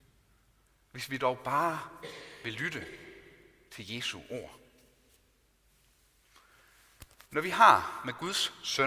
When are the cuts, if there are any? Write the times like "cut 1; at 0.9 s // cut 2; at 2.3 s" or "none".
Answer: none